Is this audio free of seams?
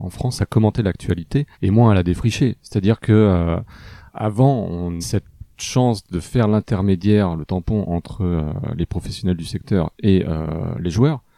no; 3 cuts; at 1.5 s, 4.1 s, 5.0 s

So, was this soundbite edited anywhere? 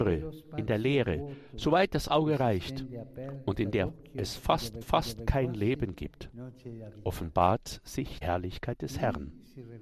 yes; 2 cuts; at 4.8 s, 8.2 s

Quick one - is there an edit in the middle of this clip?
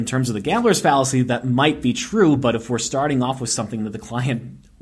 no; 0 cuts

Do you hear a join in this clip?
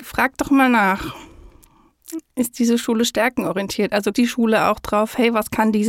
yes; 1 cut; at 4.1 s

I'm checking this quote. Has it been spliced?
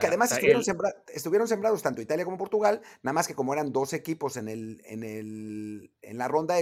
no; 0 cuts

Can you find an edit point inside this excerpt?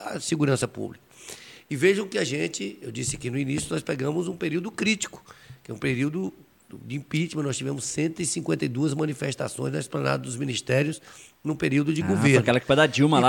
no; 0 cuts

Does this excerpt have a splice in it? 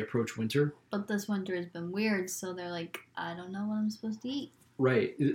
no; 0 cuts

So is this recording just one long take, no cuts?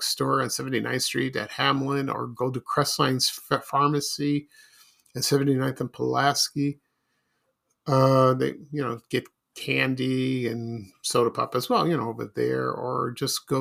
yes; 0 cuts

